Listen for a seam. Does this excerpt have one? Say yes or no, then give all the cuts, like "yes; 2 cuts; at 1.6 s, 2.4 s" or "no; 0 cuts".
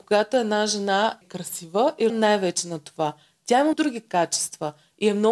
yes; 3 cuts; at 1.2 s, 2.1 s, 3.7 s